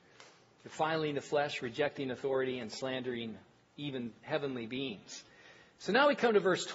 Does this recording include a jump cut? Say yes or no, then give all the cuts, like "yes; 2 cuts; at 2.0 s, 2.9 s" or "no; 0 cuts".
no; 0 cuts